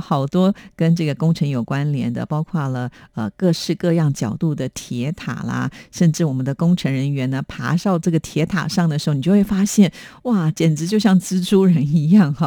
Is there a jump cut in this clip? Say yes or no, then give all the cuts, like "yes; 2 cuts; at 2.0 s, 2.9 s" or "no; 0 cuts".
no; 0 cuts